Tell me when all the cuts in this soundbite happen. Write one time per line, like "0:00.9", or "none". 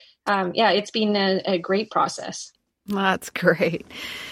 none

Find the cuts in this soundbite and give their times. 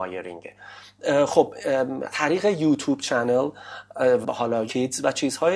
0:02.1
0:04.2
0:04.7

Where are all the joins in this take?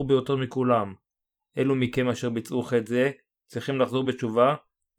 none

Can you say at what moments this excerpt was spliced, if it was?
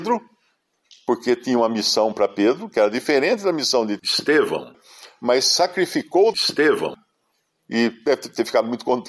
none

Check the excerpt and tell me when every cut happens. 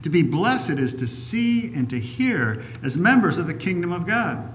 none

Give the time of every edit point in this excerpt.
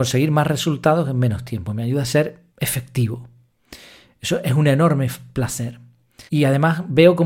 0:02.5
0:06.3

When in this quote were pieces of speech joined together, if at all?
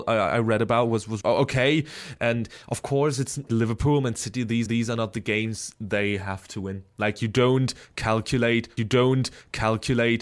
0:01.2
0:03.5
0:04.7
0:08.8

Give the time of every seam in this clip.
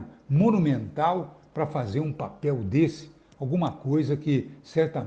none

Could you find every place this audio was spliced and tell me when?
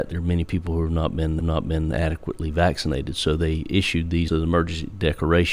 0:01.4
0:04.3

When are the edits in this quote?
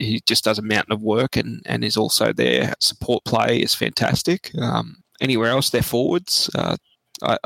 0:02.8

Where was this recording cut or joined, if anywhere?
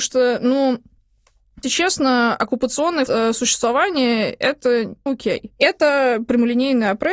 0:01.6
0:03.1
0:05.1

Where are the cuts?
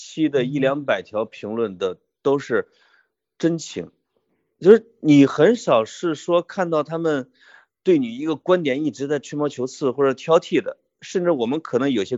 none

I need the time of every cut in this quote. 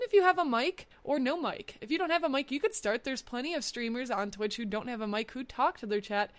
none

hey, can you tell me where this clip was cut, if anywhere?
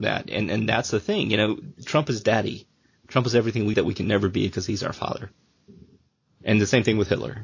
0:03.7

